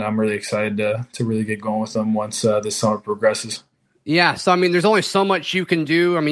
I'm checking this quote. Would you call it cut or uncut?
uncut